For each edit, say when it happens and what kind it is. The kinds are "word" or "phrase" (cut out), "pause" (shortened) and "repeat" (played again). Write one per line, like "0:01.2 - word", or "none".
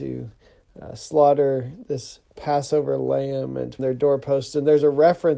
0:03.8 - phrase